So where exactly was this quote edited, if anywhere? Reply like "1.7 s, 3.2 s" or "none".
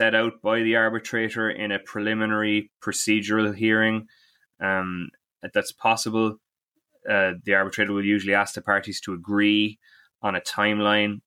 5.5 s